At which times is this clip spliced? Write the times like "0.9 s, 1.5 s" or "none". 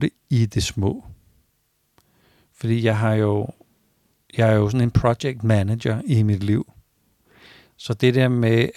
none